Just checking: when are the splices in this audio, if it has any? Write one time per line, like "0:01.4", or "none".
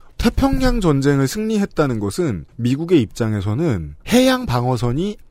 0:02.5
0:04.0